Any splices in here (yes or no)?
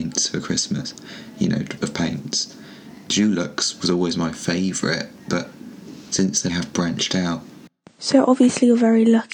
yes